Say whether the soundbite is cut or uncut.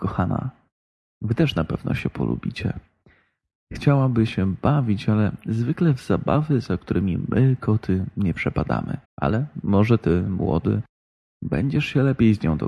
cut